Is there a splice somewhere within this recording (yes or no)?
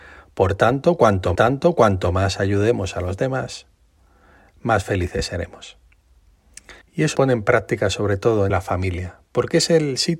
yes